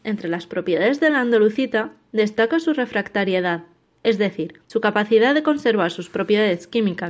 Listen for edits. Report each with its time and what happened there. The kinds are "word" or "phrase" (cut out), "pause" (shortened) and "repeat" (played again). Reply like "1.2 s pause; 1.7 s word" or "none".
4.6 s pause